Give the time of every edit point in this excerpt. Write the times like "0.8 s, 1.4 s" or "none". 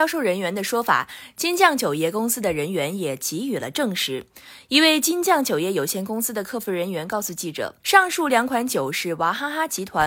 7.8 s